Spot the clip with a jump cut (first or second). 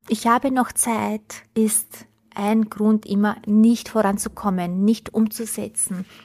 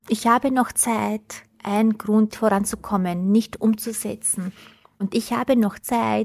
second